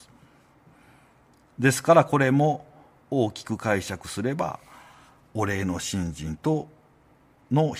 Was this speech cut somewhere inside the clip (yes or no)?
no